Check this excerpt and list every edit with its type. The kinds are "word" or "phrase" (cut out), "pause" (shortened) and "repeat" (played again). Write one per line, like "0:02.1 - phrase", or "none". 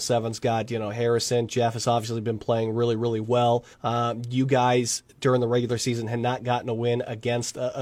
0:03.7 - pause